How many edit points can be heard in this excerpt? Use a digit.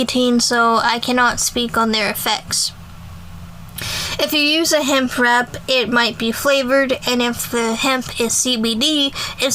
0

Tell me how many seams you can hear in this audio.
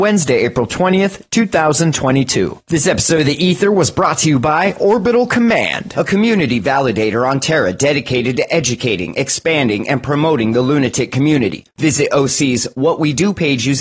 0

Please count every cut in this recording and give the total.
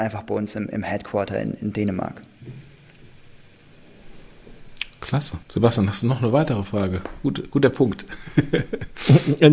1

